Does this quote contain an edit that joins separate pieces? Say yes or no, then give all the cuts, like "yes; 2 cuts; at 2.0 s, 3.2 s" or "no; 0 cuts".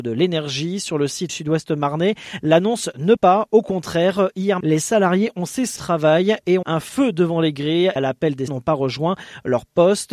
yes; 7 cuts; at 1.3 s, 3.2 s, 4.6 s, 5.8 s, 6.6 s, 8.0 s, 8.5 s